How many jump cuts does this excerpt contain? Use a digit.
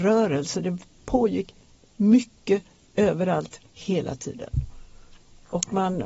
0